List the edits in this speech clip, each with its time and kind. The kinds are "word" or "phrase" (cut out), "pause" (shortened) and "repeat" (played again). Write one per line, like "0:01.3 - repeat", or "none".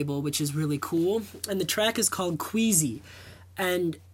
none